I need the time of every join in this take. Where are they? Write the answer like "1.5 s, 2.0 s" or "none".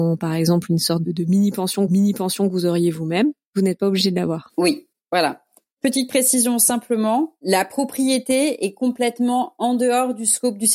1.0 s, 1.9 s, 4.5 s